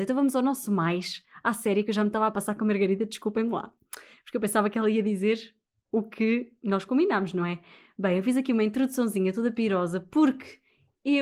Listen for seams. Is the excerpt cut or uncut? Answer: uncut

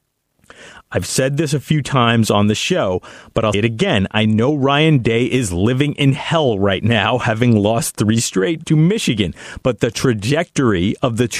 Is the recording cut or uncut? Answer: cut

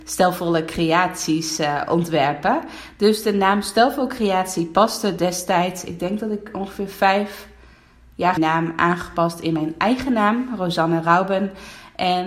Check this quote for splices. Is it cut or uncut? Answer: cut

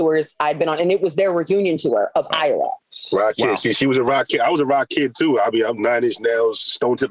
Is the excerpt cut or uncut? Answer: uncut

